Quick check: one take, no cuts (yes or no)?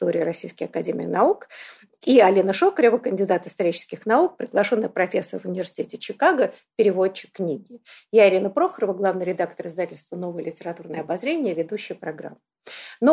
yes